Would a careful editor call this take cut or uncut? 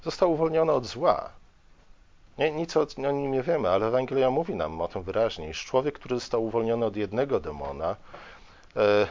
uncut